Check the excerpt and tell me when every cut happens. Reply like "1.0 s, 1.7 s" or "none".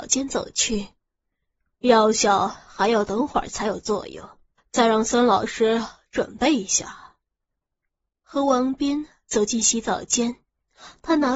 4.6 s